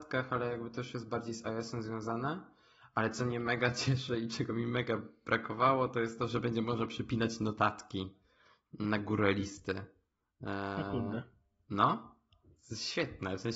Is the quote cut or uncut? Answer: uncut